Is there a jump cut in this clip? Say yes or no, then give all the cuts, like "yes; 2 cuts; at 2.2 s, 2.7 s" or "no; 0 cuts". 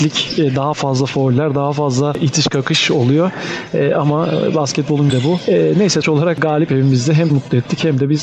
yes; 4 cuts; at 5.1 s, 6.0 s, 6.7 s, 7.3 s